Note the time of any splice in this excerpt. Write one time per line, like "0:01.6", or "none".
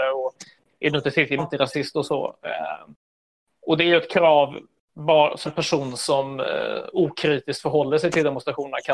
0:01.4
0:05.4